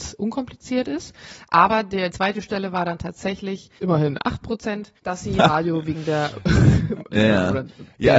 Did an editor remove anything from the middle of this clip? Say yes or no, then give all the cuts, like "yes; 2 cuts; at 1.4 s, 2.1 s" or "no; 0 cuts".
yes; 4 cuts; at 2.1 s, 3.8 s, 5.0 s, 7.1 s